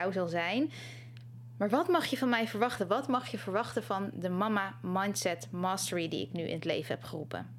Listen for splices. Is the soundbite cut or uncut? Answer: uncut